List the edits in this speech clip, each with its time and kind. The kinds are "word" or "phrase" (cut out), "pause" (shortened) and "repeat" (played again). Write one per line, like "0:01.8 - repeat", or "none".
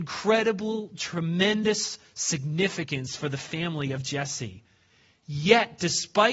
none